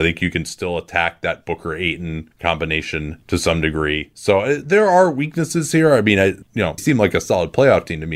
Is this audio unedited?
no; 3 cuts; at 4.6 s, 6.5 s, 6.8 s

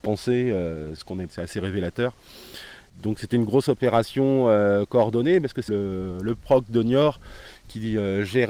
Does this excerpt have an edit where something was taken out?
yes; 3 cuts; at 1.0 s, 1.3 s, 5.7 s

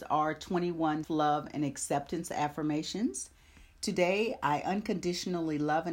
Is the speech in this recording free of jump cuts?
no; 1 cut; at 1.0 s

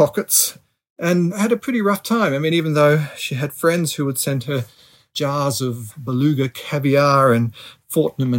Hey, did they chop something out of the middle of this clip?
no; 0 cuts

